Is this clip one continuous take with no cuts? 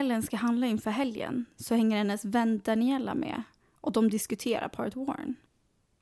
yes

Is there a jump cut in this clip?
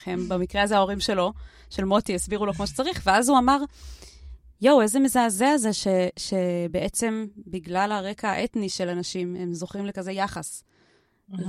no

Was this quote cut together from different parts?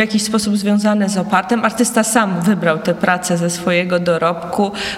no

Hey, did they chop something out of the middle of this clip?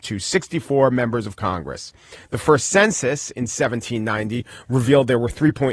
no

